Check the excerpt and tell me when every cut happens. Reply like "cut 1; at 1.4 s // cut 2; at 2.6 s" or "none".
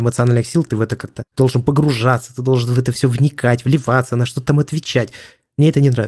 none